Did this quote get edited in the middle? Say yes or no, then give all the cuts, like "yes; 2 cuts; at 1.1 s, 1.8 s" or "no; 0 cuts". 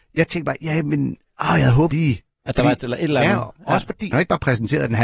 yes; 3 cuts; at 1.9 s, 2.8 s, 4.1 s